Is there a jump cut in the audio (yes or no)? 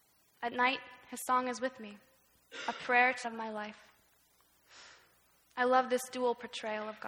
yes